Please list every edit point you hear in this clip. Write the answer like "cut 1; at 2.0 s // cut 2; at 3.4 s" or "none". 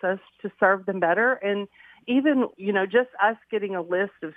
cut 1; at 2.5 s